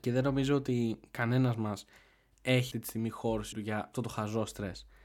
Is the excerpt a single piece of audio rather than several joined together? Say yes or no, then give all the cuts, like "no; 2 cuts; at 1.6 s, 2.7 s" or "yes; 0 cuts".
no; 3 cuts; at 2.7 s, 3.5 s, 3.9 s